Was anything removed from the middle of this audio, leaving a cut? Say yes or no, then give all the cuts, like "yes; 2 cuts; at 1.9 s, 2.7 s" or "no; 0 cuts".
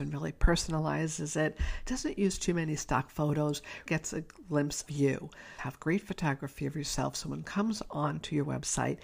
yes; 3 cuts; at 3.9 s, 4.9 s, 7.4 s